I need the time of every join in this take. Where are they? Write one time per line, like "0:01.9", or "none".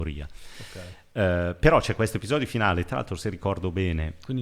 none